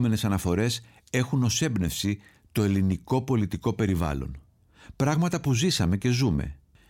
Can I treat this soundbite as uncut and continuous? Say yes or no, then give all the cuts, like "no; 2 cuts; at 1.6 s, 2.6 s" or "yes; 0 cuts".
yes; 0 cuts